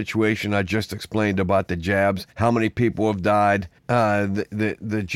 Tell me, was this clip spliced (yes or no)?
yes